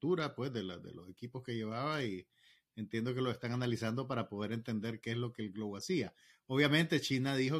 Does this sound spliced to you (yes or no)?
no